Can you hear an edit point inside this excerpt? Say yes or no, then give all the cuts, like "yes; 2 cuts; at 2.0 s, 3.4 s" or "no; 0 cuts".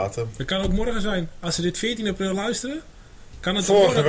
no; 0 cuts